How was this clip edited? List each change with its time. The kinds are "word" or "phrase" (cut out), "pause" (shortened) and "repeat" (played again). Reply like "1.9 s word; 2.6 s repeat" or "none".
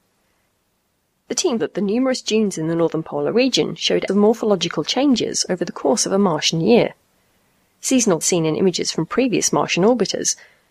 1.6 s word; 4.1 s word; 8.2 s phrase